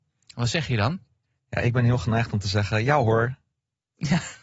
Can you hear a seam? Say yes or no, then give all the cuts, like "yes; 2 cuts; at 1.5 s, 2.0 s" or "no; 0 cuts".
no; 0 cuts